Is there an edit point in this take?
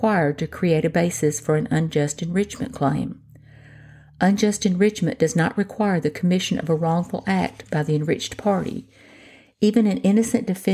no; 0 cuts

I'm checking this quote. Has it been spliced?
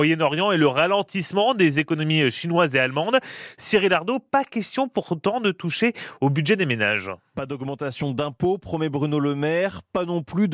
no; 0 cuts

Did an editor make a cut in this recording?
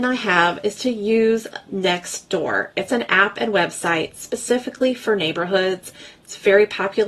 no; 0 cuts

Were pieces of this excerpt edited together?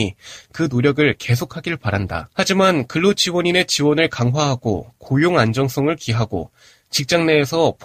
yes; 1 cut; at 2.3 s

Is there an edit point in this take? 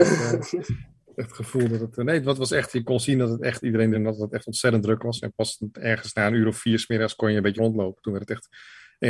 yes; 3 cuts; at 3.6 s, 3.9 s, 7.6 s

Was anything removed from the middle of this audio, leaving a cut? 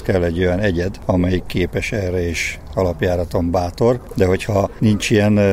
no; 0 cuts

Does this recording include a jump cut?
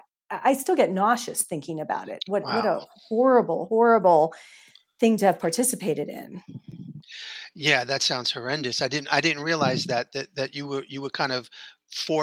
no; 0 cuts

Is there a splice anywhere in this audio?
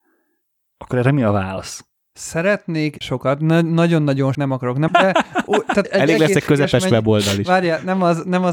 yes; 4 cuts; at 3.0 s, 4.3 s, 4.9 s, 5.8 s

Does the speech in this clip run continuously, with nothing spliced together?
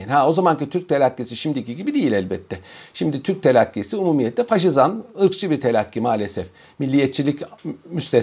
yes; 0 cuts

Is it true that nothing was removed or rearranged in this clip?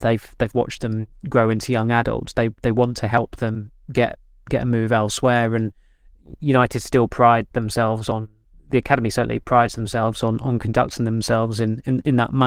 yes; 0 cuts

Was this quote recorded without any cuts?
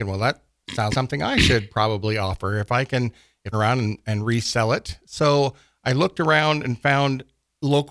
no; 2 cuts; at 0.9 s, 3.5 s

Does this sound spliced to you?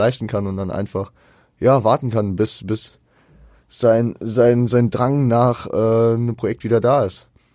no; 0 cuts

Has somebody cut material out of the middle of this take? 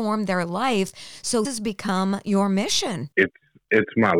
yes; 2 cuts; at 1.4 s, 3.1 s

